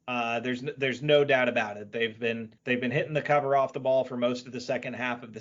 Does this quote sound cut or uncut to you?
cut